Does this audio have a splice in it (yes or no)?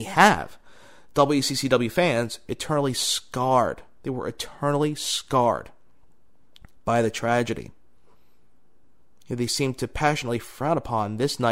no